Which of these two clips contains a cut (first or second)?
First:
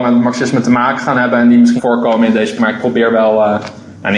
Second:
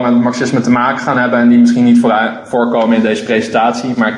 first